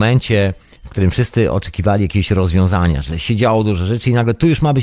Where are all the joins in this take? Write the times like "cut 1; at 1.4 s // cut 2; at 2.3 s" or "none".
none